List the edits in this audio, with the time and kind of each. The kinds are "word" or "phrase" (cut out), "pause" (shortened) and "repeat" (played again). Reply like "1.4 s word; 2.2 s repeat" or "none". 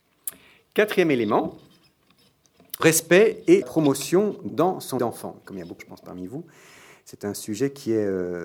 2.8 s word; 3.6 s word; 4.5 s word; 5.0 s word; 5.8 s word